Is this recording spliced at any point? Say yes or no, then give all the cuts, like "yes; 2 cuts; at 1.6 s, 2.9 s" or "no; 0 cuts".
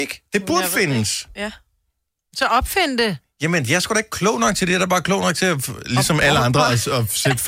no; 0 cuts